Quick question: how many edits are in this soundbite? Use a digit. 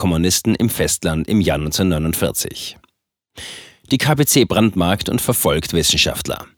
0